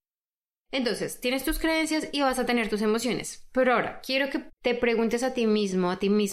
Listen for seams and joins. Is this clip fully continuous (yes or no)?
no